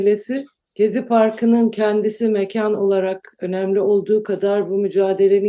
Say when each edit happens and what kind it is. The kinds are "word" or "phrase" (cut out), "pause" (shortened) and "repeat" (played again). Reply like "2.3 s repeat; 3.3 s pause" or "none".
none